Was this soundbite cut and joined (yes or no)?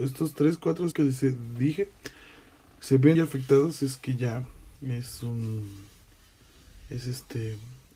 yes